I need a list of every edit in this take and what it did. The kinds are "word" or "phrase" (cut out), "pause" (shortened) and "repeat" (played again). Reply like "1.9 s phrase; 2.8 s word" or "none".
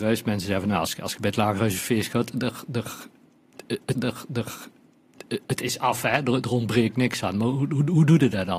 4.0 s repeat